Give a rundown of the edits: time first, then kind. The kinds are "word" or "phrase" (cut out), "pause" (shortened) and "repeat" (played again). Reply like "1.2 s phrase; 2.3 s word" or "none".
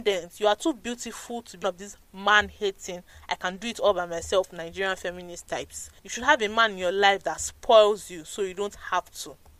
1.6 s word; 6.0 s pause

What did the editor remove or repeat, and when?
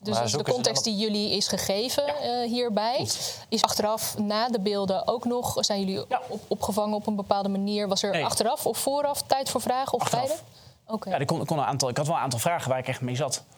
3.6 s word

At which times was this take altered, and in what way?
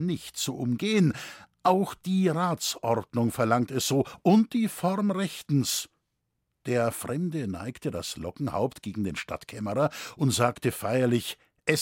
none

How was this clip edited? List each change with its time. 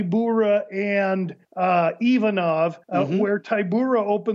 1.4 s pause; 2.8 s pause

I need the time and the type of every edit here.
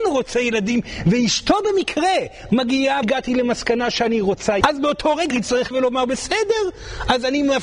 3.0 s phrase; 4.6 s word; 5.3 s phrase; 5.7 s word

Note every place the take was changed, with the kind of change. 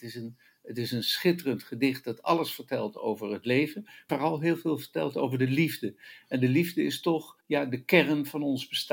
4.1 s word; 7.4 s pause

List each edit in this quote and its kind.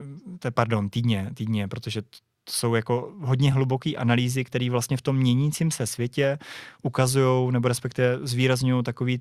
none

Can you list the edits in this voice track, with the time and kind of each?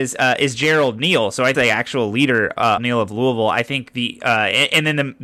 1.5 s phrase; 2.8 s phrase

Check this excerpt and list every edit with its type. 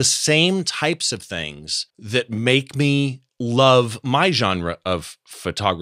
1.9 s pause; 3.3 s pause

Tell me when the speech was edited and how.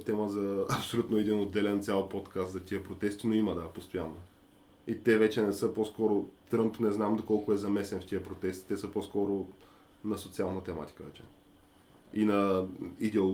none

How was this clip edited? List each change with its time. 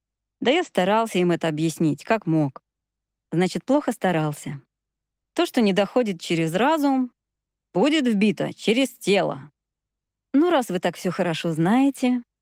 none

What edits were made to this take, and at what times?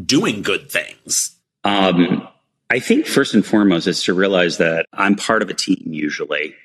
none

